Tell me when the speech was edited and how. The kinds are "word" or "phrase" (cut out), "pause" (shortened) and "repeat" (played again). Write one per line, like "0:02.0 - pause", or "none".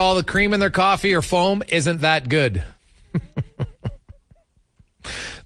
0:02.8 - pause